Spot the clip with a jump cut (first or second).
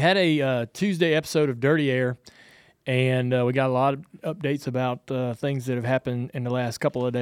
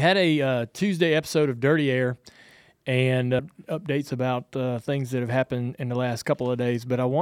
second